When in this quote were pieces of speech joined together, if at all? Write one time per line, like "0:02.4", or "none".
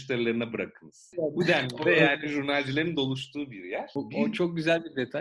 none